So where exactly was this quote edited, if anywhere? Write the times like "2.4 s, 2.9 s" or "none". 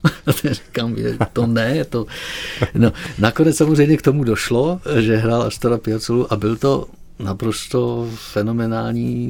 none